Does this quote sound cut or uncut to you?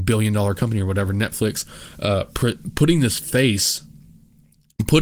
uncut